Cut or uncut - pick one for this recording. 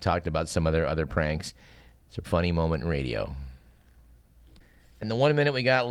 cut